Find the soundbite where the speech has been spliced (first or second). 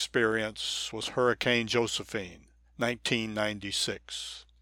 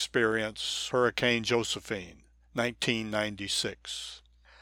second